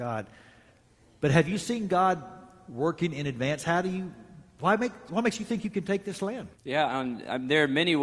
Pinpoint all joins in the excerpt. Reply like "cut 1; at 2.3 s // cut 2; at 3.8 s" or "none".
cut 1; at 6.5 s

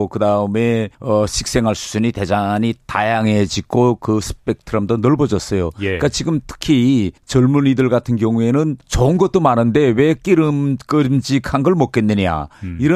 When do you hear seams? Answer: cut 1; at 0.9 s // cut 2; at 7.2 s // cut 3; at 8.8 s

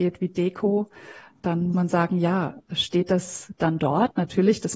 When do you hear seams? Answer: cut 1; at 1.7 s

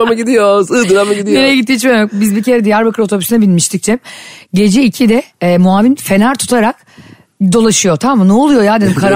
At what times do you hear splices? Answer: cut 1; at 5.3 s

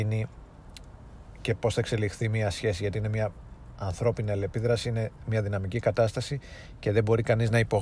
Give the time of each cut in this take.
none

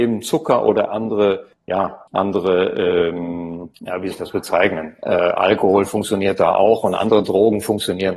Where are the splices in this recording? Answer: cut 1; at 2.1 s // cut 2; at 4.1 s

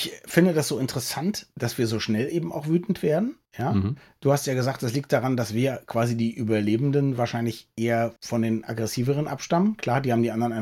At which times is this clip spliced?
cut 1; at 3.5 s // cut 2; at 8.2 s

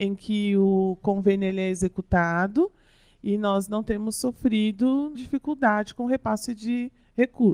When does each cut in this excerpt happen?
cut 1; at 5.1 s

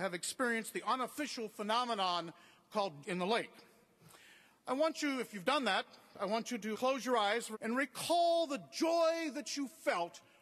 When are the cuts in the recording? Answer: cut 1; at 3.0 s // cut 2; at 6.7 s // cut 3; at 7.5 s

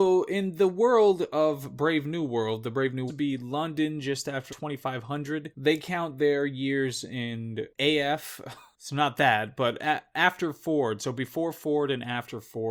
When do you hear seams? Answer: cut 1; at 3.1 s // cut 2; at 4.5 s

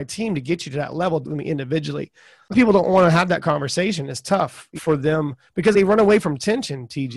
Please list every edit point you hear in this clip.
cut 1; at 1.2 s // cut 2; at 2.5 s // cut 3; at 4.8 s // cut 4; at 5.7 s

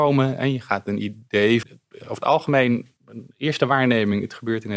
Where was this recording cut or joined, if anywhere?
cut 1; at 1.6 s // cut 2; at 3.0 s

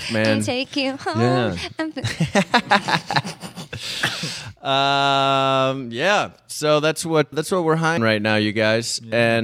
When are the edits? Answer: cut 1; at 7.3 s // cut 2; at 8.0 s

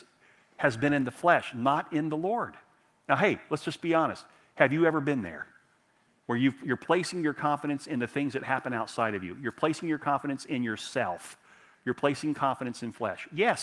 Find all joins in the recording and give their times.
none

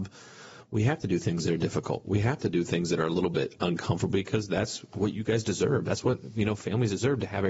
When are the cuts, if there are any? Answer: none

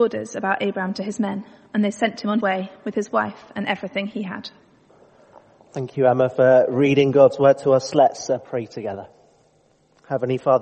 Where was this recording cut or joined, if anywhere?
cut 1; at 2.4 s

